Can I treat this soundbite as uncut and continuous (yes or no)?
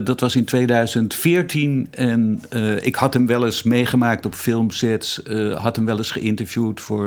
yes